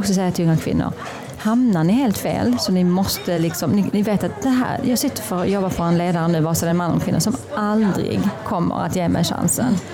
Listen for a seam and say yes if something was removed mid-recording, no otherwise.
no